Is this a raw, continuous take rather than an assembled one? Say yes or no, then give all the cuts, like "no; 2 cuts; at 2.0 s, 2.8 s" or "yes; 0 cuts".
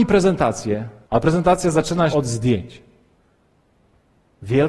no; 2 cuts; at 1.0 s, 2.1 s